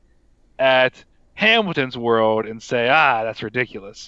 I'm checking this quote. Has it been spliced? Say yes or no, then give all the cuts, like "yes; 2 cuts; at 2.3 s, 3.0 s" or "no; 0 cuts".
no; 0 cuts